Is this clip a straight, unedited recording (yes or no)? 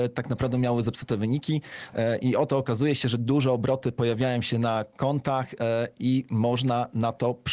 yes